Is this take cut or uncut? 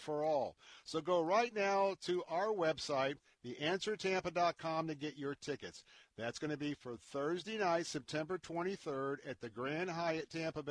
uncut